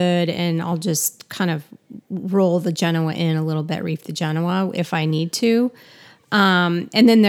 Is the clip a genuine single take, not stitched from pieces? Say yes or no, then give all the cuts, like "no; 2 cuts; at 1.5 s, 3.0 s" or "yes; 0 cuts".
yes; 0 cuts